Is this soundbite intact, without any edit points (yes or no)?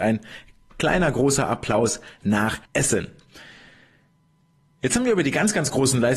no